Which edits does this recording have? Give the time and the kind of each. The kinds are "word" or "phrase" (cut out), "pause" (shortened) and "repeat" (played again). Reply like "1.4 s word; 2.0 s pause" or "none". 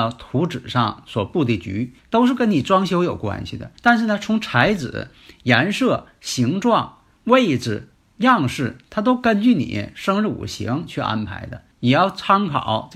2.0 s pause; 3.8 s pause; 7.9 s pause; 11.7 s pause